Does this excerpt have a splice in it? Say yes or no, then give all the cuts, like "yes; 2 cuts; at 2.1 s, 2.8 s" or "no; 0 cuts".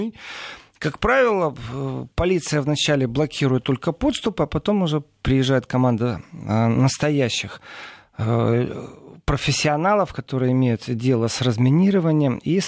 no; 0 cuts